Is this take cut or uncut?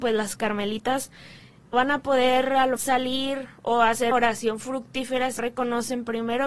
cut